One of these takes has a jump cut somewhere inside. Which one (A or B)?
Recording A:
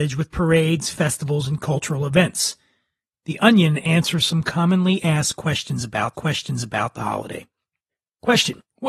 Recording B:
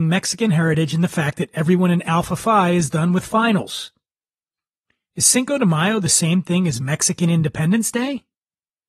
A